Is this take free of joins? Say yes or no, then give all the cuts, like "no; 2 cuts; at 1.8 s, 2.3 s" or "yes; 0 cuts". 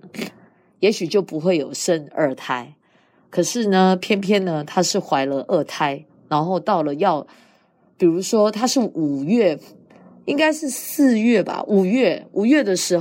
yes; 0 cuts